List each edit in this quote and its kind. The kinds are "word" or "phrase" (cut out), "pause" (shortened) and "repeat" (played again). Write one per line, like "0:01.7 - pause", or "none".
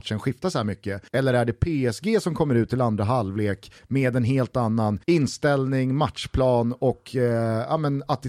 0:01.1 - pause
0:03.8 - pause
0:05.0 - pause